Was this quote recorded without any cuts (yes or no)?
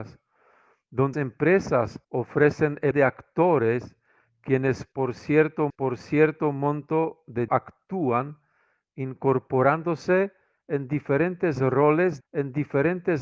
no